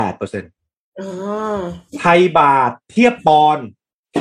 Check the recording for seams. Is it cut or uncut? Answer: cut